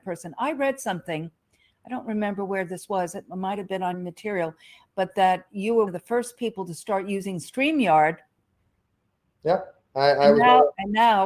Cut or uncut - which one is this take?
cut